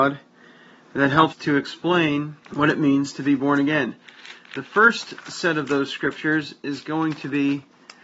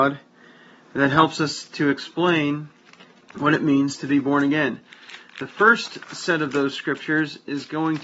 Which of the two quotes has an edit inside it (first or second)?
first